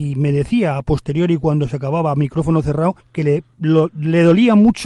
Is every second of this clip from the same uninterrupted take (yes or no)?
no